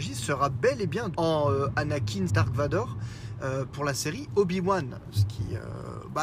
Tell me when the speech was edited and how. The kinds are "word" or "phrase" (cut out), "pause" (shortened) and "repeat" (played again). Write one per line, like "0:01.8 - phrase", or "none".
0:01.1 - word
0:02.3 - word
0:03.7 - word